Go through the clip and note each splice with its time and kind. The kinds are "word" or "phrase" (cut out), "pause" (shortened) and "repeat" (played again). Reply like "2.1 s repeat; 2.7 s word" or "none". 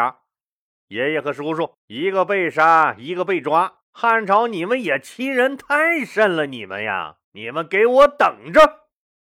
1.8 s pause; 3.8 s pause; 7.2 s pause